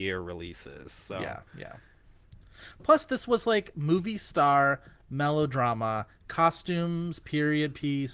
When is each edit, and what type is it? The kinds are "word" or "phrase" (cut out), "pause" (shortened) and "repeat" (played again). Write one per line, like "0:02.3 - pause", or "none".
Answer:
0:01.5 - pause